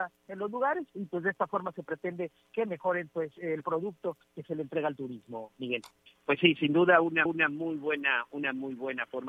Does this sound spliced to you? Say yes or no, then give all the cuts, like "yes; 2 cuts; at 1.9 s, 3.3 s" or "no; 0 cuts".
yes; 2 cuts; at 6.1 s, 7.3 s